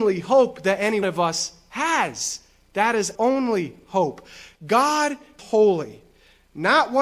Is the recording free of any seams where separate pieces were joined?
no; 3 cuts; at 1.0 s, 3.1 s, 5.4 s

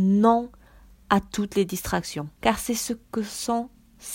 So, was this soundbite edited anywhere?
yes; 1 cut; at 2.3 s

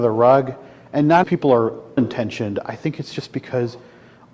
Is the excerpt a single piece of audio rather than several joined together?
no; 2 cuts; at 1.2 s, 2.0 s

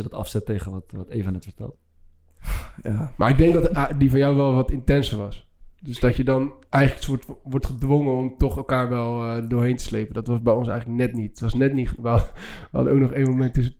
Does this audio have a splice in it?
yes; 1 cut; at 6.7 s

